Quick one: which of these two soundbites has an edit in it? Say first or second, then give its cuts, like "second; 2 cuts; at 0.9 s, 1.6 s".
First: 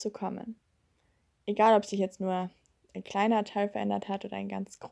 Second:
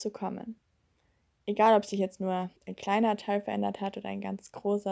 second; 1 cut; at 2.6 s